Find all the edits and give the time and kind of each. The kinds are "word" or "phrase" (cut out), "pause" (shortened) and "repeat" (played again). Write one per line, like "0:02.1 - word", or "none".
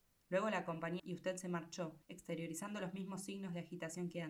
0:01.0 - phrase
0:02.0 - pause